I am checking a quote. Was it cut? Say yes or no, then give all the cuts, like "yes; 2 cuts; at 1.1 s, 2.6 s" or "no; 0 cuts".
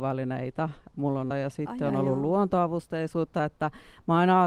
yes; 1 cut; at 1.3 s